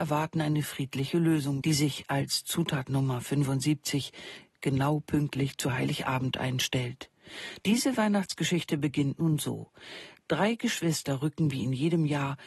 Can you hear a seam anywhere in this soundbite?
yes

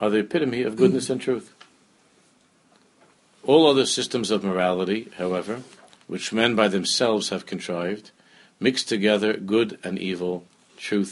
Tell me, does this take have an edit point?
no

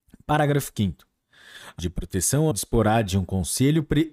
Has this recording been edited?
yes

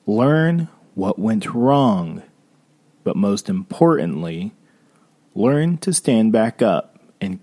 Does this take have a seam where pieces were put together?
no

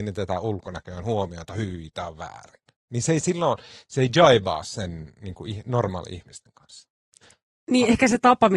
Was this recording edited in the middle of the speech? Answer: no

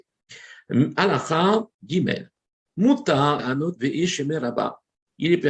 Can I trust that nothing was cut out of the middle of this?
no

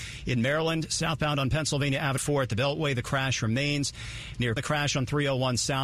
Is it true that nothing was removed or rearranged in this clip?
no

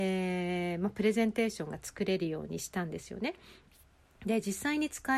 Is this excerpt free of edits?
yes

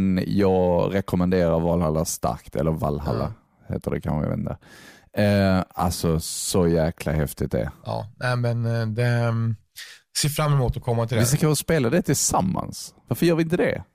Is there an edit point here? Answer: no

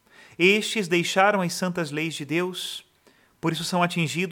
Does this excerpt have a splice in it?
no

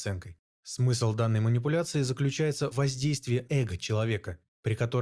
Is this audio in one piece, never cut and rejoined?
no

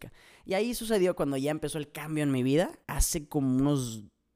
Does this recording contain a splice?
yes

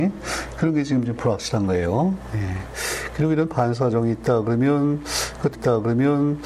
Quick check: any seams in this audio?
yes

